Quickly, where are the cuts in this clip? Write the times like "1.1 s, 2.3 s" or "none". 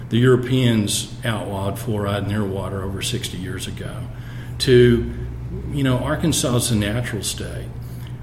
none

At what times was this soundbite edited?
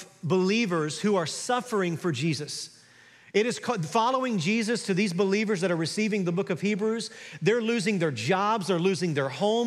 none

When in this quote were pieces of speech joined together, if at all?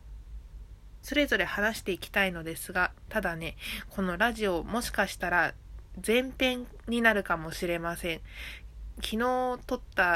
none

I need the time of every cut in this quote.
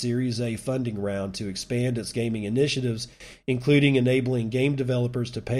none

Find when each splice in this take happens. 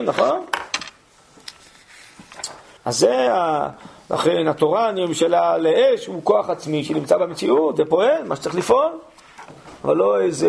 2.8 s

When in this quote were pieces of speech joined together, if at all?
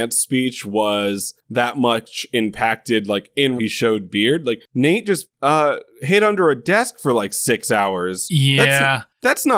3.6 s

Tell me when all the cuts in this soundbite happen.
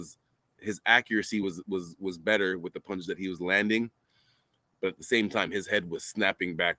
none

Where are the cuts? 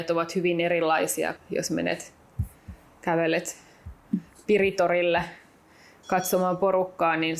1.4 s

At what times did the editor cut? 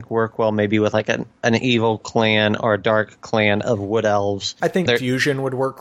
1.4 s, 4.9 s

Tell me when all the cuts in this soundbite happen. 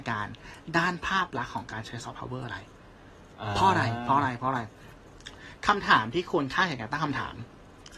none

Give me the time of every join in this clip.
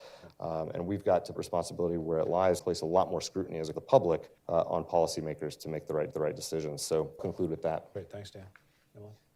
1.3 s, 2.6 s, 3.7 s, 4.4 s, 6.1 s, 7.2 s

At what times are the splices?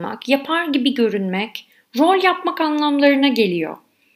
none

